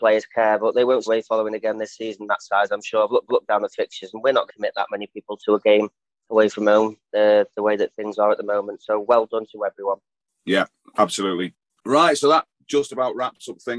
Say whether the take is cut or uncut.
cut